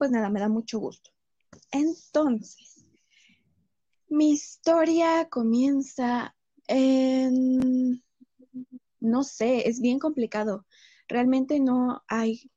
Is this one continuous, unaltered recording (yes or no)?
no